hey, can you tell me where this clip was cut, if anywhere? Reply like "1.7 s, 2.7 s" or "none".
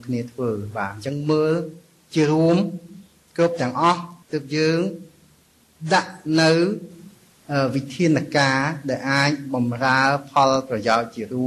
4.2 s

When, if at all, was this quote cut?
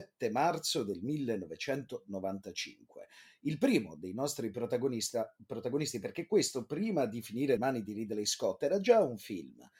7.6 s

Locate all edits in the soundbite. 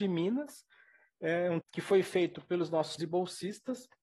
1.6 s, 3.0 s

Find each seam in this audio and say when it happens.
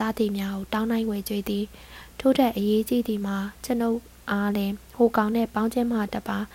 none

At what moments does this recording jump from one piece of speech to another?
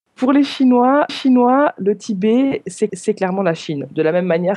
1.1 s, 2.9 s

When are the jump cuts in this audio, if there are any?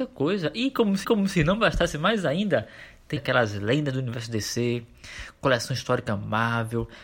1.0 s, 3.2 s

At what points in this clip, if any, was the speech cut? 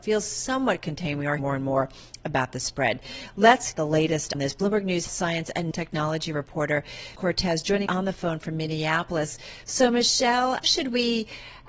1.4 s, 3.7 s, 4.3 s, 5.1 s, 5.7 s, 7.2 s, 7.9 s, 10.6 s

